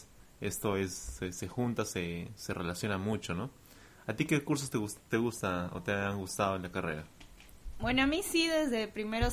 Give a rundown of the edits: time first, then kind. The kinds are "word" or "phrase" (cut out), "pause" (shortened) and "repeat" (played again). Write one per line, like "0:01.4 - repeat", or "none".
none